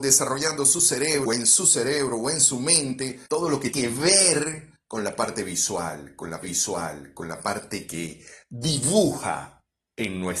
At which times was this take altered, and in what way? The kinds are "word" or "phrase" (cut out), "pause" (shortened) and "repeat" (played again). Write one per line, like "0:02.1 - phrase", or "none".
0:01.3 - word
0:03.3 - pause
0:03.7 - word
0:06.4 - repeat